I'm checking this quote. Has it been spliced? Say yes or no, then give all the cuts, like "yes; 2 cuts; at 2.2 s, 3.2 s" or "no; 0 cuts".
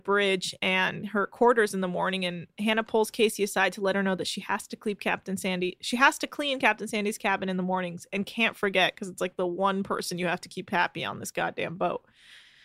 no; 0 cuts